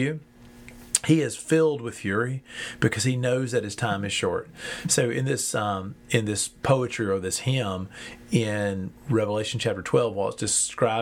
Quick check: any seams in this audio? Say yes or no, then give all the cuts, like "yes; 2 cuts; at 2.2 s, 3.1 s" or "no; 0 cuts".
no; 0 cuts